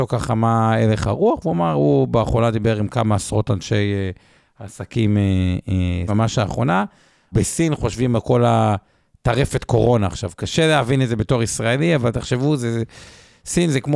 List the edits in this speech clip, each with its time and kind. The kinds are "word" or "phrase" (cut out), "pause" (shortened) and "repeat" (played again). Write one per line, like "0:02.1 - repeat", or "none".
0:06.1 - word
0:07.3 - word